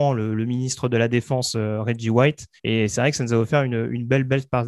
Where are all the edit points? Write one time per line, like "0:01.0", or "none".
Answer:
0:02.6